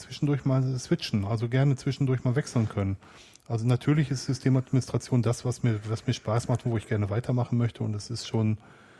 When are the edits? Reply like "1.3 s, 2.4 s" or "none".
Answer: none